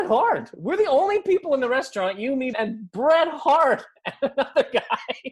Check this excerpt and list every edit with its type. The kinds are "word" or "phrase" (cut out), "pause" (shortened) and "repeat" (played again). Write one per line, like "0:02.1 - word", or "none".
0:02.5 - word